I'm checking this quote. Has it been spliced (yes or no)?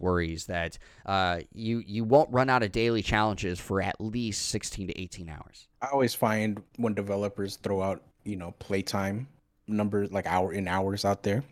yes